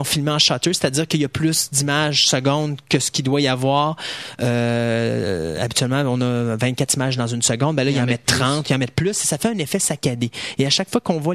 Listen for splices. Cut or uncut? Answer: uncut